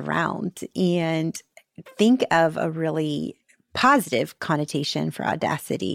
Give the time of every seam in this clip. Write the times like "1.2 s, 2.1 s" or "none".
none